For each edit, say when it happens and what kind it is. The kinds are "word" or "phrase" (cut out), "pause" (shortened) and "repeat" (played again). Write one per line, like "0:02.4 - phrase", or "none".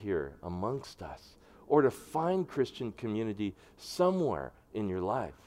none